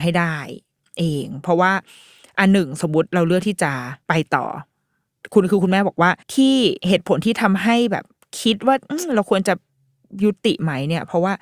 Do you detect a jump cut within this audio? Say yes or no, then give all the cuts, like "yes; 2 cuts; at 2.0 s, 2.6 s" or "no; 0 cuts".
yes; 2 cuts; at 4.0 s, 6.2 s